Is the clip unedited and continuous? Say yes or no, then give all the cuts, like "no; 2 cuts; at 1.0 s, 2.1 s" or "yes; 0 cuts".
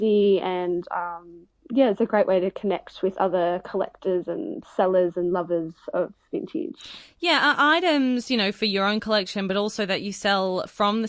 yes; 0 cuts